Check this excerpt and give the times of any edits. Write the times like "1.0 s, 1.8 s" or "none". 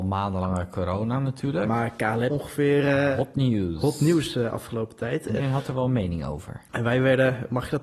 2.3 s, 5.4 s